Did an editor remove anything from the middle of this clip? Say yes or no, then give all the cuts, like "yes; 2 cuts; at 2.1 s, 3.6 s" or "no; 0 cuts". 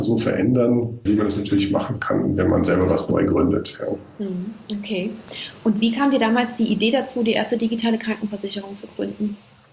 yes; 1 cut; at 1.1 s